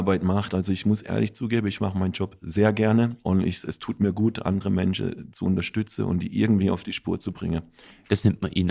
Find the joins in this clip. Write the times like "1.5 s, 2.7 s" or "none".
none

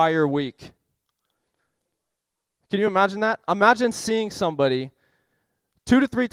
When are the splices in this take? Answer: none

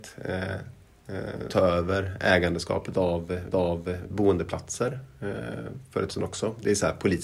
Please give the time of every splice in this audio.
1.5 s, 3.5 s, 6.1 s

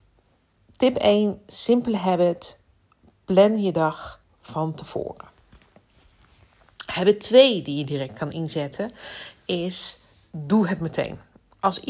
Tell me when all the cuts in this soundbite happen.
4.2 s

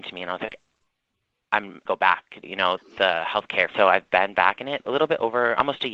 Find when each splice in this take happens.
1.9 s, 2.4 s, 2.8 s, 3.7 s, 4.8 s

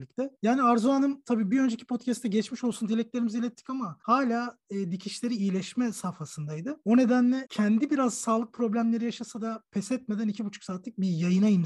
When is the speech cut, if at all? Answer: none

